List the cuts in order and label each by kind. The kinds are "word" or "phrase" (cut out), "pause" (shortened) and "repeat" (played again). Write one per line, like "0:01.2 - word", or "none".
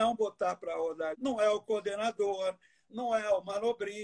0:01.1 - word